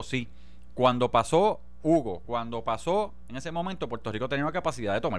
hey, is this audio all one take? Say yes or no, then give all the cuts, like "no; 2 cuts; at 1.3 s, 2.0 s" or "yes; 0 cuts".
no; 1 cut; at 3.3 s